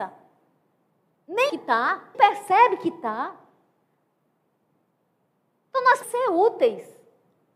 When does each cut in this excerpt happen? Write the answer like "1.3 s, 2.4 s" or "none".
1.5 s, 2.1 s, 6.0 s